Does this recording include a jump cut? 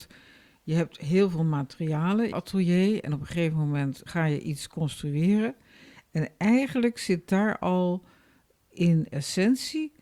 yes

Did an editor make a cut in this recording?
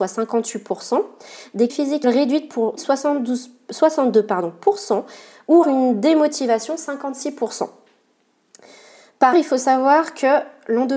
yes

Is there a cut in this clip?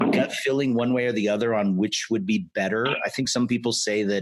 no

